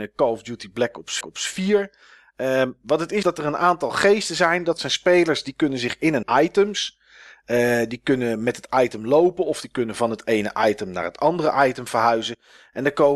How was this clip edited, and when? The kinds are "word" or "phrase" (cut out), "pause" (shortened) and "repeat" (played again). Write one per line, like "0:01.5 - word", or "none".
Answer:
0:01.2 - repeat
0:03.2 - word
0:06.2 - phrase